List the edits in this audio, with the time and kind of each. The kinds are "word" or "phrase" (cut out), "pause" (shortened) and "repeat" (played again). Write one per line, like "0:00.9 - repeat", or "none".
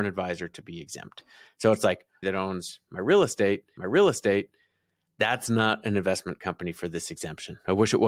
0:02.2 - phrase
0:03.8 - repeat